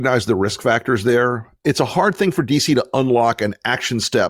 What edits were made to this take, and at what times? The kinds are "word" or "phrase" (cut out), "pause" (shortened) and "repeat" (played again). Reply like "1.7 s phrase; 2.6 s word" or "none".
none